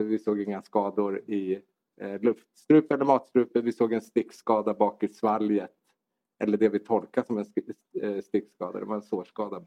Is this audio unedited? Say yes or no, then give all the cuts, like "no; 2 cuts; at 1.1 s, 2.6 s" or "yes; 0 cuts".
yes; 0 cuts